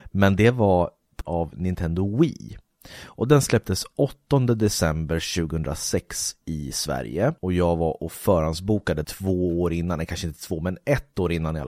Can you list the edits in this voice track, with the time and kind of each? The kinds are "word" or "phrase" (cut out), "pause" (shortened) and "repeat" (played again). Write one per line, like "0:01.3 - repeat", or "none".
0:01.2 - word
0:07.4 - pause
0:09.0 - phrase